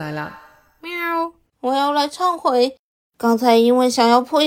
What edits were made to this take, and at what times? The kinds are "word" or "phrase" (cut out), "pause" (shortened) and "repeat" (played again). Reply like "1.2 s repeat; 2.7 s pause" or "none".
none